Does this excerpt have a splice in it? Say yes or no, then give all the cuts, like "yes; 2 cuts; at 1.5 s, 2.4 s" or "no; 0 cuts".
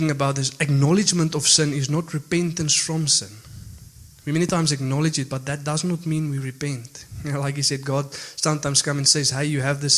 no; 0 cuts